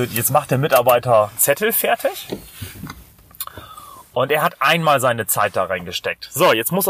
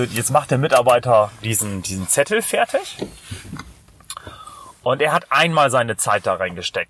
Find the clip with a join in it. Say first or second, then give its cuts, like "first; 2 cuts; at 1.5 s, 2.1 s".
first; 1 cut; at 1.4 s